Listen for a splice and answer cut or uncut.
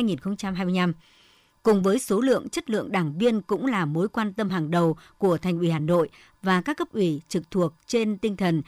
uncut